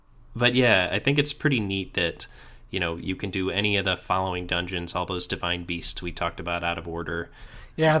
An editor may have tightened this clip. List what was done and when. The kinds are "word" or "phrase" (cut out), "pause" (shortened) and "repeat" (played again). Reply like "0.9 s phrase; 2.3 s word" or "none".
none